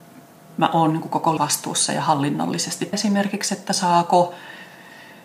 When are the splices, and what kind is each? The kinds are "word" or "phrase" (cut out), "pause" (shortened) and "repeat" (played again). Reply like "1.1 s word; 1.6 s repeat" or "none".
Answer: 1.4 s word; 2.9 s phrase